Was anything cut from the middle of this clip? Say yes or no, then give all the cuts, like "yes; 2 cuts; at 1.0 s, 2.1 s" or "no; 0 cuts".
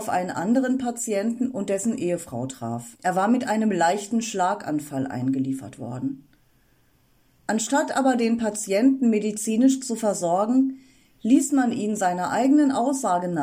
yes; 1 cut; at 3.0 s